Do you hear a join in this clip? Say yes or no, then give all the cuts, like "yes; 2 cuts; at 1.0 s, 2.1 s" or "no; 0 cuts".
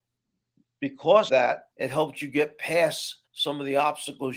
yes; 3 cuts; at 1.3 s, 1.7 s, 3.3 s